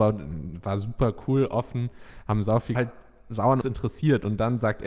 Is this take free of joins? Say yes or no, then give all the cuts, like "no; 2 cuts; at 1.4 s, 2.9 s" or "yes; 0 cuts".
no; 2 cuts; at 2.7 s, 3.6 s